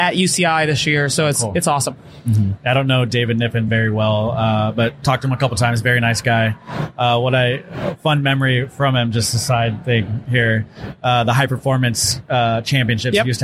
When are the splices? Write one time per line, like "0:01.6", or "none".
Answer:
none